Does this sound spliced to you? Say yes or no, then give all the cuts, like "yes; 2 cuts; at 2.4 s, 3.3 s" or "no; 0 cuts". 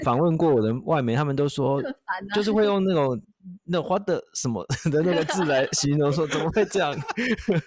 yes; 1 cut; at 3.2 s